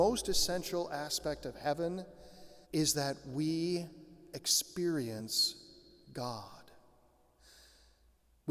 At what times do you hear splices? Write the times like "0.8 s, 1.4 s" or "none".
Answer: 2.6 s